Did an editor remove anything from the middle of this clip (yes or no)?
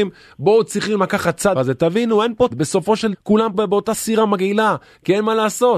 yes